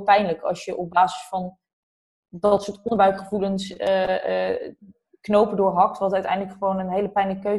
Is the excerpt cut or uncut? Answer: uncut